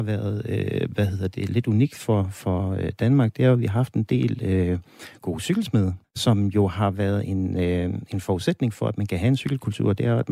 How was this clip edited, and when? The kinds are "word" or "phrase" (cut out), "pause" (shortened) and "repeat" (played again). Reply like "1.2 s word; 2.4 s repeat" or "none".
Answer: 6.0 s pause